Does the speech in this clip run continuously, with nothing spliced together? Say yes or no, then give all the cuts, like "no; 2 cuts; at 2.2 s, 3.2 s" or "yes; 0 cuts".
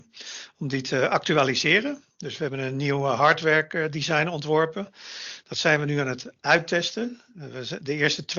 yes; 0 cuts